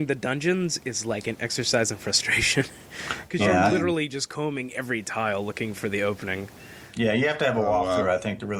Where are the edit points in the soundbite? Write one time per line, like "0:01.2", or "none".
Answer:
none